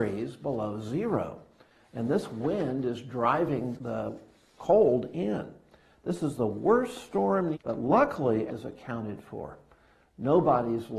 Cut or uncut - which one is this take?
cut